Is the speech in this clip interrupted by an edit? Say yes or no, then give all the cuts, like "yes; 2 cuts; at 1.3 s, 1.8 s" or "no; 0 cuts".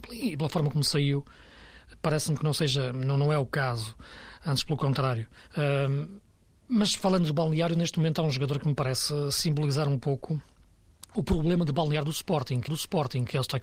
yes; 2 cuts; at 5.5 s, 12.7 s